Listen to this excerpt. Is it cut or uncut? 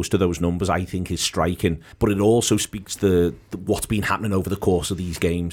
cut